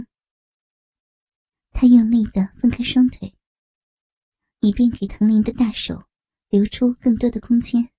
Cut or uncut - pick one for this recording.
uncut